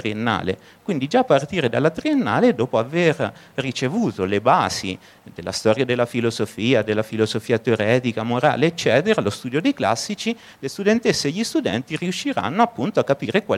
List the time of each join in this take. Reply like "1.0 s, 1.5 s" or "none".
none